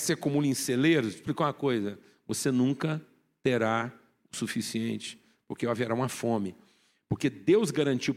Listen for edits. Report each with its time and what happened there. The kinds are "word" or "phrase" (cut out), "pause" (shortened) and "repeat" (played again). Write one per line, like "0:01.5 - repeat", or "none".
none